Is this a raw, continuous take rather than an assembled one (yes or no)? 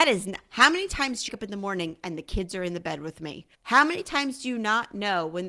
no